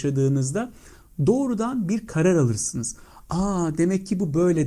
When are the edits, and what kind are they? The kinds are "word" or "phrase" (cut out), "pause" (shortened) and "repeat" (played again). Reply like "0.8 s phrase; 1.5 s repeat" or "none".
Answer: none